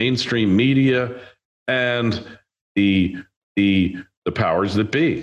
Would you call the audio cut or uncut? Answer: cut